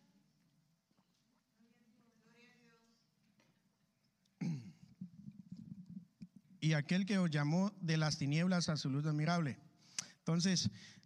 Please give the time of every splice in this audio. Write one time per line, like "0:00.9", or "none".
none

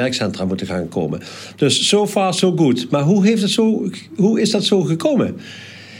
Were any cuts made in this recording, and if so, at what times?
none

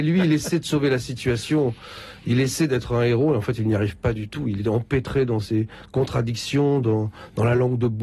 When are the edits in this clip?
none

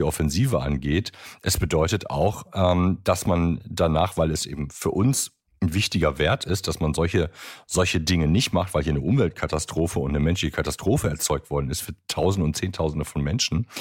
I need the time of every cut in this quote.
none

